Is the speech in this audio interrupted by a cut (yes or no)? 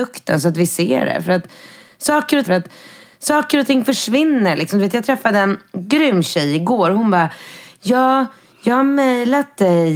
yes